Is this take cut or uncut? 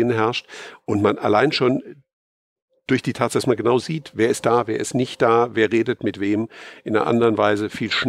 uncut